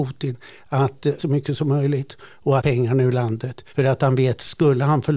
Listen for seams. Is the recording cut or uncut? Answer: cut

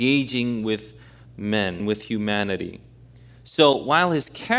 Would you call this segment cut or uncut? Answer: cut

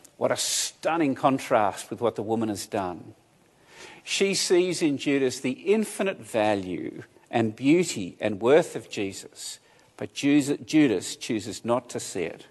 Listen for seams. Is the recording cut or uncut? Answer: uncut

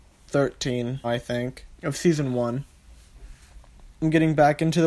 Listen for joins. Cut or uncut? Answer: cut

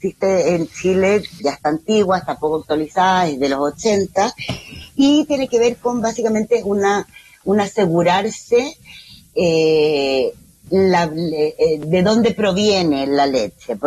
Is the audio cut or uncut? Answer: cut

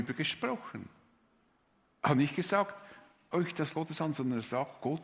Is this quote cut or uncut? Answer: cut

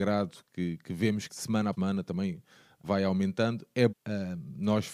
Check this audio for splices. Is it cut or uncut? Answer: cut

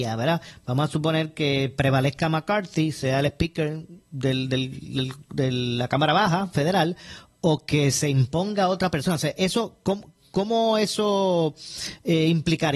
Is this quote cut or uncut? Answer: uncut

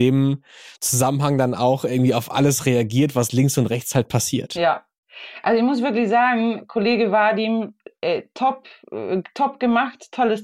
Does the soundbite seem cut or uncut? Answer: uncut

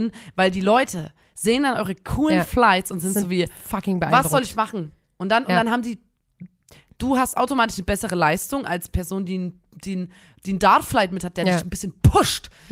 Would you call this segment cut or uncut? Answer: uncut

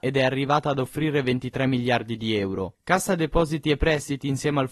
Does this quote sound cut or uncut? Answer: uncut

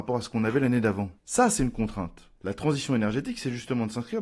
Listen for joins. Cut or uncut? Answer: cut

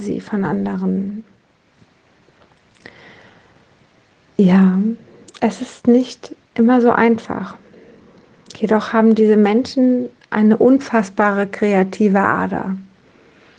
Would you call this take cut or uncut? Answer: uncut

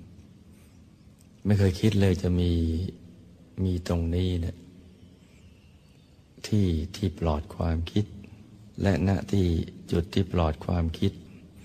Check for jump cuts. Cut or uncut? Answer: cut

